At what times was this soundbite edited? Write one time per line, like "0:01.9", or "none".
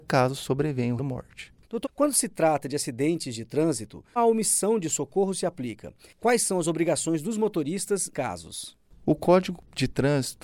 0:01.0
0:01.8
0:04.2
0:08.1